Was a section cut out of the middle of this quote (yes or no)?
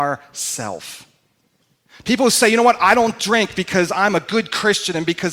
yes